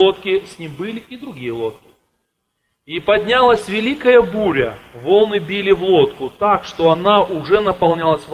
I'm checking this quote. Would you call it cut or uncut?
uncut